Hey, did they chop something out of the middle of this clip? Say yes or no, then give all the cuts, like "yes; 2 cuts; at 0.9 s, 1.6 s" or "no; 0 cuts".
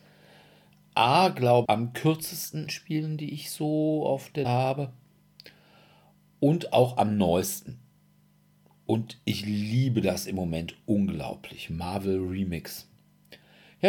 yes; 3 cuts; at 1.6 s, 2.7 s, 4.4 s